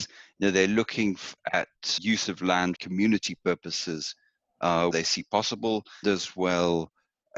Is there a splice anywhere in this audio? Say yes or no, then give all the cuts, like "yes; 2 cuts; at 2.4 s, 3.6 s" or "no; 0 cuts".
yes; 4 cuts; at 2.0 s, 2.8 s, 4.9 s, 6.0 s